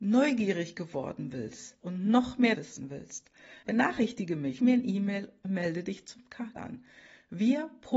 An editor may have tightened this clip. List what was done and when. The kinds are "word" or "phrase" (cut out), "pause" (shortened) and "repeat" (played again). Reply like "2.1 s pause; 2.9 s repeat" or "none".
1.8 s word; 2.5 s word; 3.6 s word; 4.6 s word; 5.4 s word; 6.6 s word

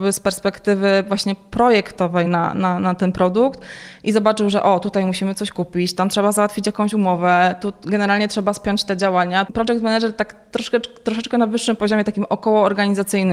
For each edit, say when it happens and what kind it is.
none

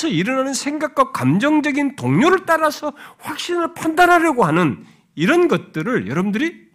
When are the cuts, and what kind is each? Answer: none

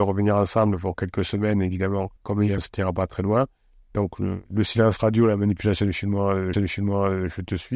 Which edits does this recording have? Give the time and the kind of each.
2.2 s pause; 2.6 s word; 4.4 s pause; 6.5 s repeat

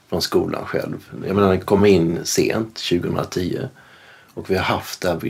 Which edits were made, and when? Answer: none

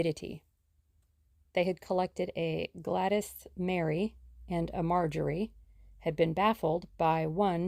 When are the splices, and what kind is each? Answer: none

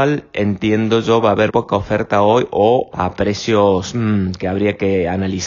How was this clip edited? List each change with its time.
1.5 s word; 2.9 s word

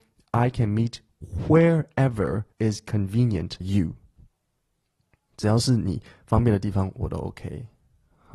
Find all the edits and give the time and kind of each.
2.5 s pause; 3.6 s word

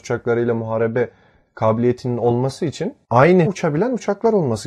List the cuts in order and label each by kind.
3.5 s word

